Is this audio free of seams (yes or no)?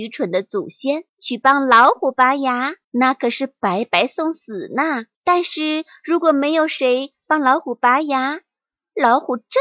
no